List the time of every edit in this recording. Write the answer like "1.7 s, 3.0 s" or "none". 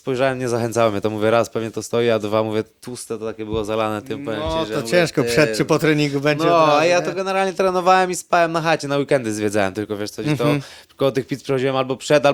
none